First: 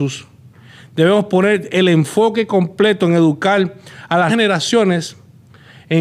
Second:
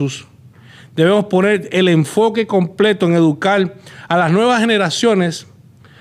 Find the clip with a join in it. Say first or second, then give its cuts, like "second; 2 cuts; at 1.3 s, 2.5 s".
first; 1 cut; at 4.3 s